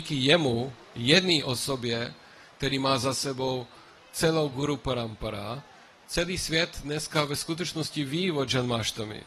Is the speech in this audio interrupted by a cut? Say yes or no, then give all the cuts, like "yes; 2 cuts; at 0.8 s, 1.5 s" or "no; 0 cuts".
no; 0 cuts